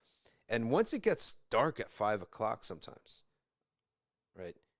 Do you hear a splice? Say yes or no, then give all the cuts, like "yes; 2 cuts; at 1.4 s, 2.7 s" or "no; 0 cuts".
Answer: no; 0 cuts